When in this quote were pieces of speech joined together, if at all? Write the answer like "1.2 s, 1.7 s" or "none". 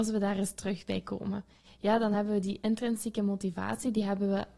none